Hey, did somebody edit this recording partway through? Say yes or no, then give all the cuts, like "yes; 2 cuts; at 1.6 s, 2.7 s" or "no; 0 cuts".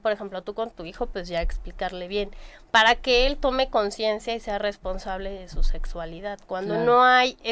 no; 0 cuts